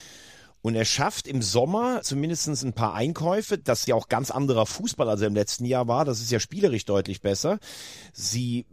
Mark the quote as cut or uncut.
cut